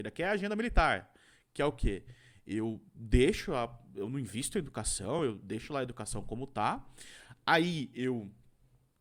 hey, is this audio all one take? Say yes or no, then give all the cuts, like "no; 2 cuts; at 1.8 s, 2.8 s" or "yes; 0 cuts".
yes; 0 cuts